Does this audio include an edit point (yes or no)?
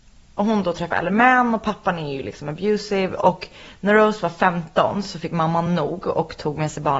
no